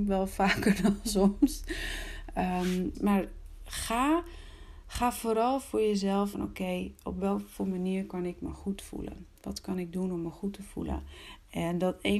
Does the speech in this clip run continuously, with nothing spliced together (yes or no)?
no